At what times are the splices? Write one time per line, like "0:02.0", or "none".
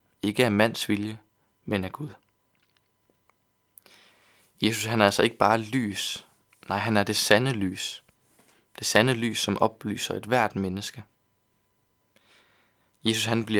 none